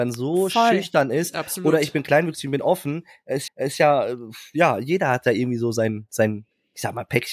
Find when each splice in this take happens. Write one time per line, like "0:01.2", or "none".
0:03.5